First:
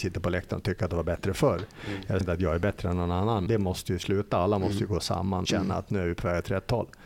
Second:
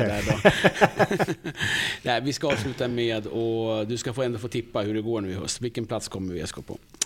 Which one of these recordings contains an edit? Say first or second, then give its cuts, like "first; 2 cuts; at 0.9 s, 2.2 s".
first; 3 cuts; at 2.2 s, 3.5 s, 5.5 s